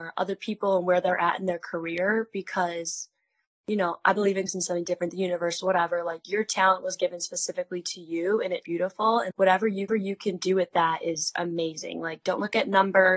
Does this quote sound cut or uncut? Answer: cut